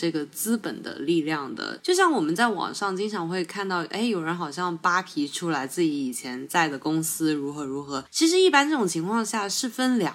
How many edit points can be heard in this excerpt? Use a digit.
0